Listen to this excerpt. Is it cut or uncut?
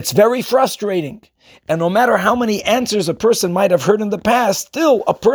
uncut